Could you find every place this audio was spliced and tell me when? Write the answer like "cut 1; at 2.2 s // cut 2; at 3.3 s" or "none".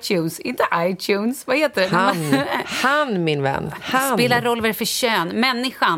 none